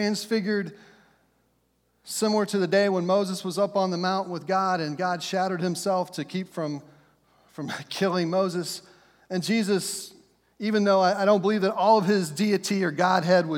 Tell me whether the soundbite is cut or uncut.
uncut